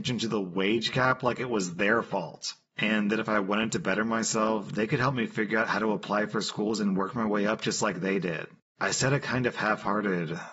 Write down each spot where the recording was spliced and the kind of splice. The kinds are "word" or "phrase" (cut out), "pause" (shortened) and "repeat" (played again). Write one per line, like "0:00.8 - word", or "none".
none